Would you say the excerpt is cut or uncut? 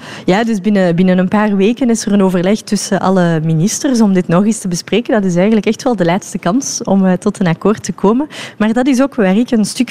uncut